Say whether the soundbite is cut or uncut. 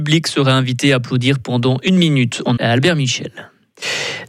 cut